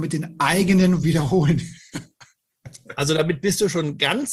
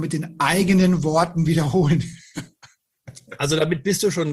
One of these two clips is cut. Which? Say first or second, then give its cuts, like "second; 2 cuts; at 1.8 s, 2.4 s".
first; 1 cut; at 1.0 s